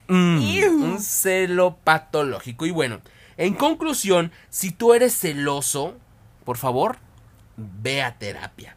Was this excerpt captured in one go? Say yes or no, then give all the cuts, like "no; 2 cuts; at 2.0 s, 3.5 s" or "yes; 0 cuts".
yes; 0 cuts